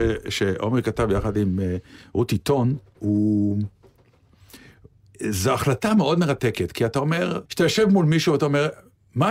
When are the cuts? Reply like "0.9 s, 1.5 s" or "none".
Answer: 7.5 s